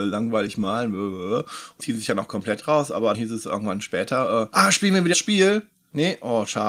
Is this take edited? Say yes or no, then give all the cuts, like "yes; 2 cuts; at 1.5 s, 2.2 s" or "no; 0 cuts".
yes; 4 cuts; at 1.8 s, 3.1 s, 4.5 s, 5.1 s